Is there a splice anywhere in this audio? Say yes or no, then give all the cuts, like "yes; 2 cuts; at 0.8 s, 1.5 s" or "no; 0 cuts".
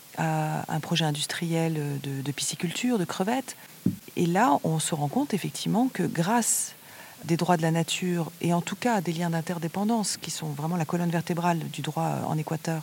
yes; 1 cut; at 7.2 s